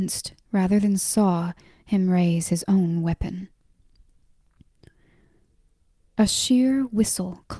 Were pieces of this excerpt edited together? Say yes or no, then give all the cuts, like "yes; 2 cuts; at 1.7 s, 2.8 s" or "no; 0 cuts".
no; 0 cuts